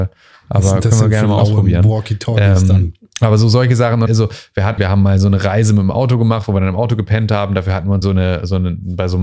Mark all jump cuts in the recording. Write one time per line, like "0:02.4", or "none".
0:04.1
0:04.8
0:08.0